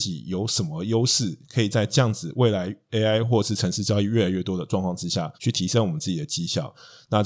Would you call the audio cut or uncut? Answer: cut